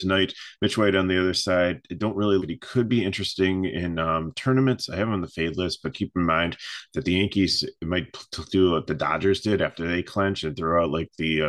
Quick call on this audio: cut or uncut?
cut